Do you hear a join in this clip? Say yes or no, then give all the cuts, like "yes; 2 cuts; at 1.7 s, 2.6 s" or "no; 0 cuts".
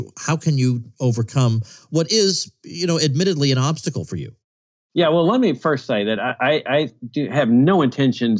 no; 0 cuts